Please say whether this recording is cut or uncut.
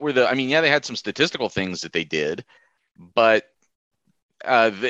uncut